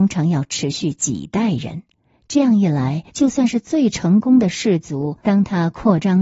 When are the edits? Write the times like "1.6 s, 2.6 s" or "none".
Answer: 3.1 s, 5.2 s